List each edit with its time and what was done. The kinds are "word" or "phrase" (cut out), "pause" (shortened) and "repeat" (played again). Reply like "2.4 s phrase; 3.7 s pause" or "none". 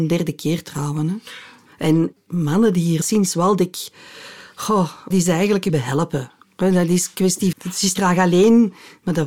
2.2 s word; 3.0 s word; 5.1 s word; 5.7 s word; 7.5 s word; 8.0 s word